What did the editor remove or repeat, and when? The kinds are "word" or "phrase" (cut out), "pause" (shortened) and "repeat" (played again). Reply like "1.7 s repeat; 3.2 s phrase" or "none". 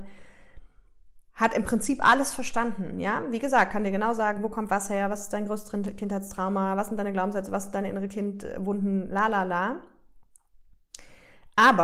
1.3 s pause